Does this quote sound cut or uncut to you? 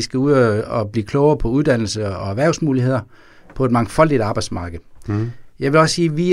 uncut